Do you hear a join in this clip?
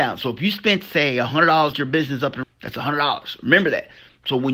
yes; 2 cuts; at 1.7 s, 2.4 s

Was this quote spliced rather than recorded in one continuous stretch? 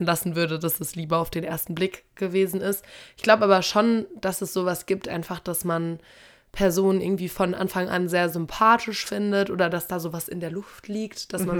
no; 0 cuts

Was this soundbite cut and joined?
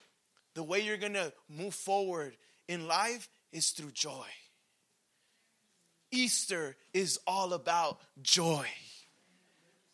no; 0 cuts

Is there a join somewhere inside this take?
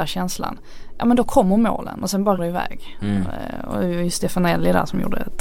yes; 1 cut; at 2.4 s

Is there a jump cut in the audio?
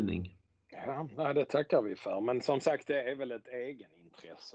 no; 0 cuts

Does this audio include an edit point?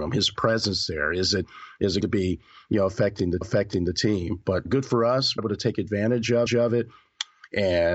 yes; 5 cuts; at 2.0 s, 3.4 s, 4.6 s, 5.4 s, 6.5 s

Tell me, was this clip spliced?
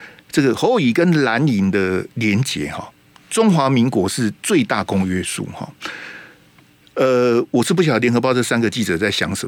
no; 0 cuts

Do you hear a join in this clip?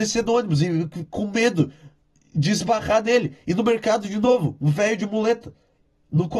no; 0 cuts

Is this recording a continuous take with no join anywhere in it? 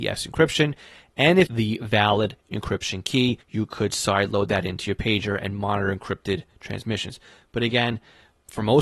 no; 2 cuts; at 1.5 s, 3.4 s

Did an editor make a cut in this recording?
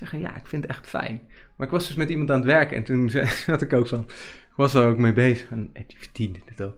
no; 0 cuts

